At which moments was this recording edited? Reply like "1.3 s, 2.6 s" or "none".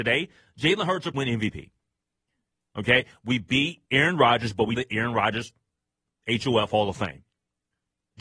1.1 s, 3.9 s, 4.7 s